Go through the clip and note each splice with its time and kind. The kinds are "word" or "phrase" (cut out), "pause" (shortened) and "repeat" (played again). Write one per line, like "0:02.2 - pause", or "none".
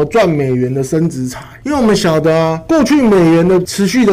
none